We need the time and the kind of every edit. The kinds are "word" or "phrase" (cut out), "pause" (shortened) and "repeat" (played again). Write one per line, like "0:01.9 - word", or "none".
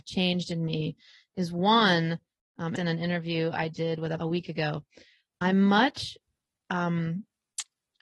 0:02.8 - phrase
0:04.2 - phrase